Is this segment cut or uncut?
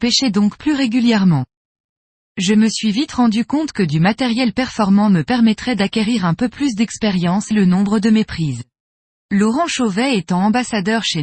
cut